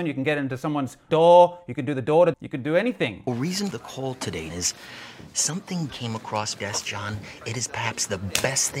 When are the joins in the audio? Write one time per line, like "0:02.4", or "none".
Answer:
0:01.1
0:02.3
0:03.7
0:04.5
0:05.9
0:06.5